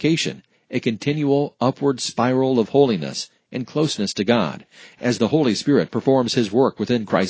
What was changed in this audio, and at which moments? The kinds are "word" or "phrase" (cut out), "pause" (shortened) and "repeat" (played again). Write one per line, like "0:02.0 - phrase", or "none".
none